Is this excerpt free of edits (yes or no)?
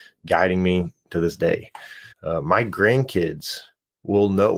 no